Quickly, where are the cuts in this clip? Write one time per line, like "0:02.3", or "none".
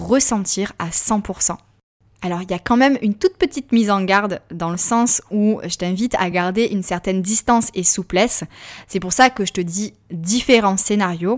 none